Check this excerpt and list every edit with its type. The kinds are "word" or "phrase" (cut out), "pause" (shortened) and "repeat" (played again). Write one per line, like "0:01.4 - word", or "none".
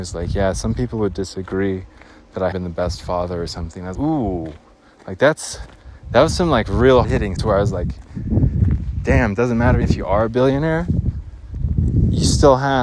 0:02.5 - word
0:04.0 - word
0:07.0 - word
0:07.4 - word
0:09.8 - word